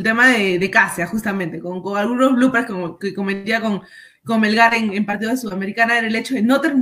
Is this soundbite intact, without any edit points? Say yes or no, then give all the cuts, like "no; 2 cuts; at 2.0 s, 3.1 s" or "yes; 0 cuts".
yes; 0 cuts